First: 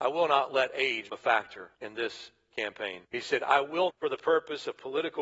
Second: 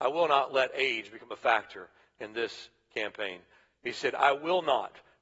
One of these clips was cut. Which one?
first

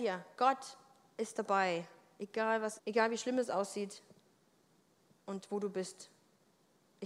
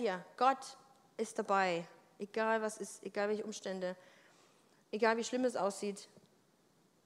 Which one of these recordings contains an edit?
first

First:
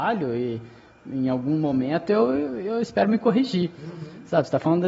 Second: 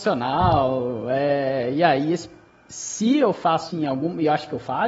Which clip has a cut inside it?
second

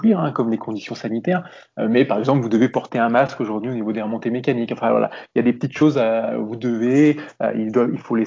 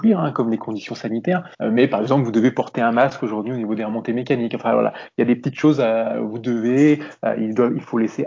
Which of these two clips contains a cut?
second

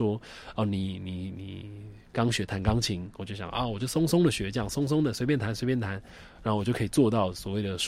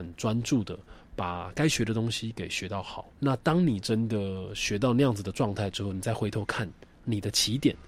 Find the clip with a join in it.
second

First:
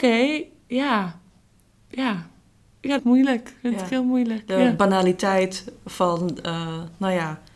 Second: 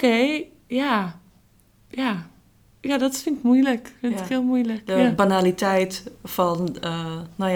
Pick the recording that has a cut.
first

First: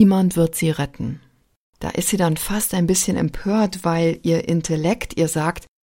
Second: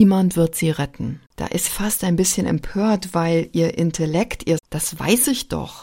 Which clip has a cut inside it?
second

